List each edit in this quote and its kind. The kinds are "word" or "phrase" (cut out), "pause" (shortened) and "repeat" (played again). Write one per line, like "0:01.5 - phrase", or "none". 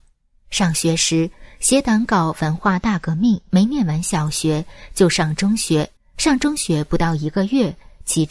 0:03.4 - pause
0:06.0 - pause

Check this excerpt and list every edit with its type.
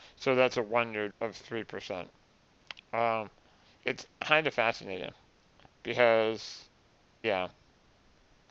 0:01.1 - word
0:03.8 - word
0:07.2 - word

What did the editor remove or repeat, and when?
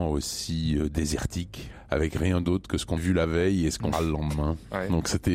0:03.0 - word
0:03.9 - word

